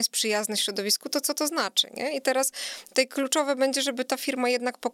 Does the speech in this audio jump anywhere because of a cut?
no; 0 cuts

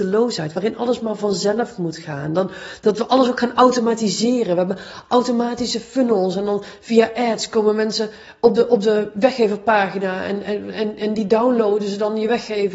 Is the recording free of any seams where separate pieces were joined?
yes; 0 cuts

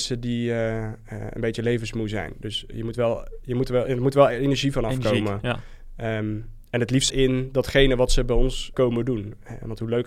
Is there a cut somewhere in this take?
yes; 2 cuts; at 7.1 s, 8.7 s

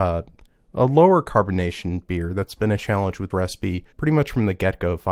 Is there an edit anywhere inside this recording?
yes; 2 cuts; at 3.3 s, 3.9 s

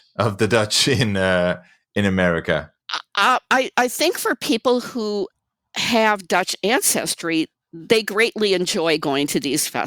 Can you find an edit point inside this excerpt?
no; 0 cuts

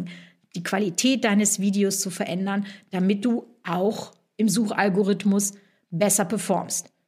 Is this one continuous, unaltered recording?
yes; 0 cuts

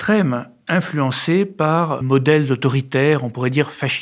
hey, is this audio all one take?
no; 1 cut; at 2.0 s

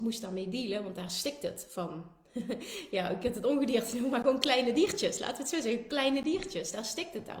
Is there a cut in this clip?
no; 0 cuts

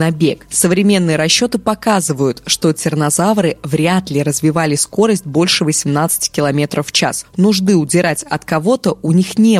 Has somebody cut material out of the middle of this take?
no; 0 cuts

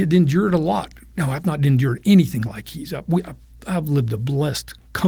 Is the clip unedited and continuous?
yes; 0 cuts

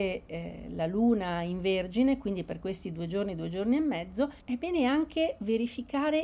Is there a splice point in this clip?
yes; 1 cut; at 4.4 s

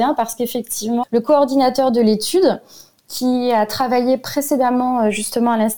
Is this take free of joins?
no; 1 cut; at 1.0 s

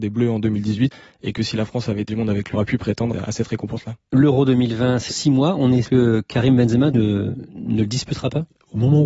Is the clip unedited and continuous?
no; 5 cuts; at 2.1 s, 2.5 s, 5.1 s, 5.8 s, 6.9 s

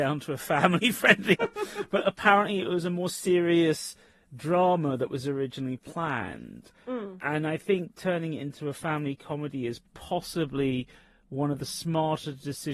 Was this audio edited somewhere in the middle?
yes; 2 cuts; at 1.4 s, 9.9 s

